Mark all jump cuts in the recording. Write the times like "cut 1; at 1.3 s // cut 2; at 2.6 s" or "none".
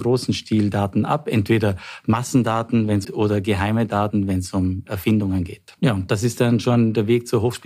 cut 1; at 3.0 s // cut 2; at 5.8 s

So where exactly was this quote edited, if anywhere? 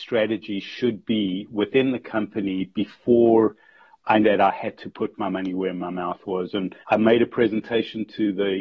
cut 1; at 4.2 s // cut 2; at 6.8 s

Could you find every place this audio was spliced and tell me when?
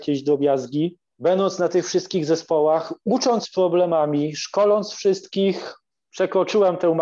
cut 1; at 3.4 s

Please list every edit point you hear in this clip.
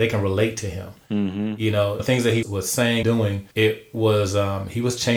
cut 1; at 2.0 s // cut 2; at 2.4 s // cut 3; at 3.0 s // cut 4; at 3.5 s

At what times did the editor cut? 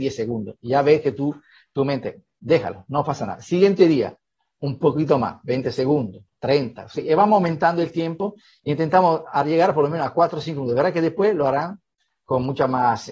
none

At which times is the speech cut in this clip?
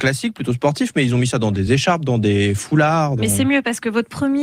none

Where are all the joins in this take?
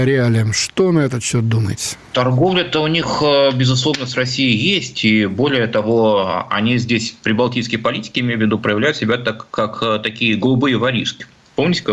none

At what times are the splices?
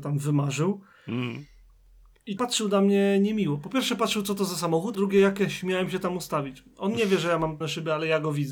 cut 1; at 2.4 s // cut 2; at 4.9 s // cut 3; at 7.6 s

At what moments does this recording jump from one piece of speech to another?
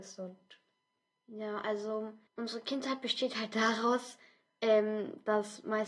cut 1; at 2.3 s

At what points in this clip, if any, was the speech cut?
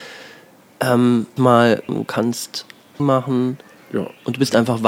cut 1; at 1.4 s // cut 2; at 1.9 s // cut 3; at 3.0 s

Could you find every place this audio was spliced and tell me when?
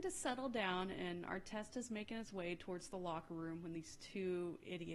none

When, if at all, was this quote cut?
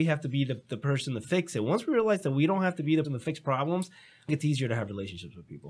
cut 1; at 3.0 s // cut 2; at 4.3 s

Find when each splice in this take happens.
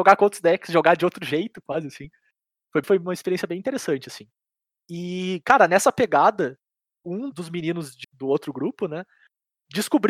cut 1; at 2.8 s // cut 2; at 7.3 s // cut 3; at 8.0 s

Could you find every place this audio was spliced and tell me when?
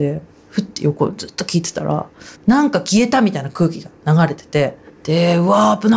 cut 1; at 2.3 s // cut 2; at 4.9 s

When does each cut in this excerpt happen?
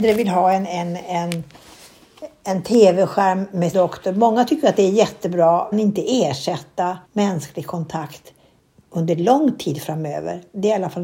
cut 1; at 3.7 s // cut 2; at 5.7 s // cut 3; at 7.0 s

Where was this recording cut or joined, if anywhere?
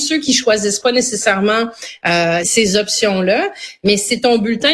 cut 1; at 2.4 s

